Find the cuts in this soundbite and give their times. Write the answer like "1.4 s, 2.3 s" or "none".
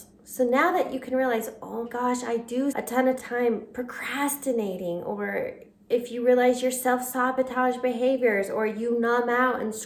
1.9 s, 2.7 s, 3.2 s